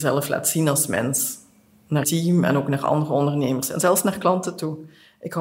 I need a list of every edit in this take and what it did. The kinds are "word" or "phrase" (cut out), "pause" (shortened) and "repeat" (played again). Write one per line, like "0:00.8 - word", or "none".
0:02.0 - word